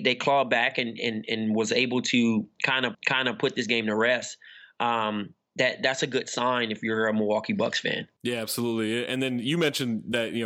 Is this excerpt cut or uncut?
cut